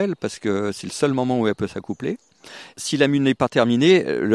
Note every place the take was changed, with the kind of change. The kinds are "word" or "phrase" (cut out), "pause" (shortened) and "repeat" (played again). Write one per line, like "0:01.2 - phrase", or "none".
none